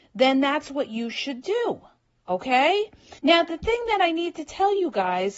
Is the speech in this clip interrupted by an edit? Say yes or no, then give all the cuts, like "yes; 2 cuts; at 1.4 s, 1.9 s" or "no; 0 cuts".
yes; 1 cut; at 3.2 s